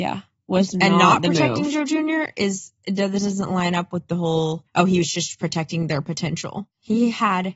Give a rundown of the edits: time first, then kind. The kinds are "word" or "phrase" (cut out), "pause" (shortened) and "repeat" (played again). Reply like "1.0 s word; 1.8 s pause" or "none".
4.7 s pause